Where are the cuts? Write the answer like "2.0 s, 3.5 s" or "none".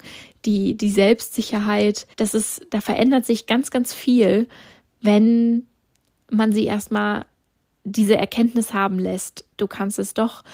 2.1 s, 9.5 s